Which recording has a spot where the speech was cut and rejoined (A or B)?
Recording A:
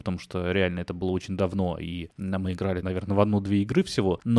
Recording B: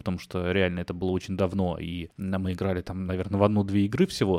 A